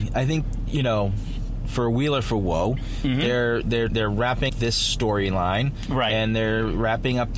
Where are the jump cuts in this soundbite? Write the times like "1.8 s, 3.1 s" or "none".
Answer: 3.9 s, 4.5 s